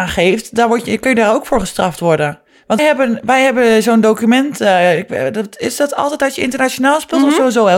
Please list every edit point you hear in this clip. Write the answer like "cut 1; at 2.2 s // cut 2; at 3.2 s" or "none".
cut 1; at 2.8 s